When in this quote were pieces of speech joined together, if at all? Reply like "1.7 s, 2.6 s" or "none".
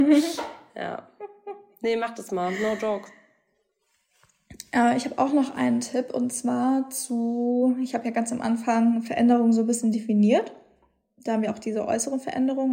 none